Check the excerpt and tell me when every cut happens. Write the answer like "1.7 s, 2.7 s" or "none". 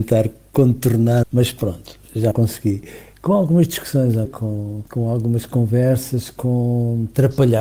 1.2 s, 2.3 s, 4.3 s, 4.9 s